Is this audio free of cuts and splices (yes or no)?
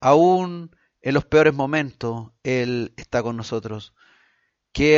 yes